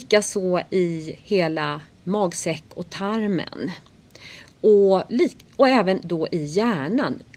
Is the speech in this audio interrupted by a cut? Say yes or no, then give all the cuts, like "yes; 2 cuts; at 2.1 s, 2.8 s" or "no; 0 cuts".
no; 0 cuts